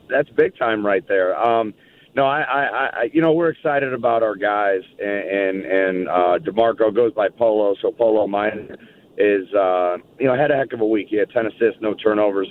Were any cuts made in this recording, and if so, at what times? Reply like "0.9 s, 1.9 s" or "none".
none